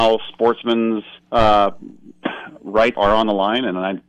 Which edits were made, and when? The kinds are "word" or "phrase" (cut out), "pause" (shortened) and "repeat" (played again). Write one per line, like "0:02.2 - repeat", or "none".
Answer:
0:01.2 - pause
0:02.9 - word